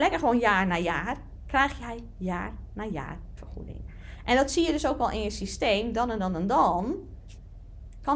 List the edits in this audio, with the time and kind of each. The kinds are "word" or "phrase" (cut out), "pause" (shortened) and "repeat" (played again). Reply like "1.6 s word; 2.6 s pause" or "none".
3.4 s word